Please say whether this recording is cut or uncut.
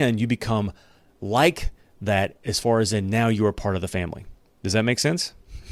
uncut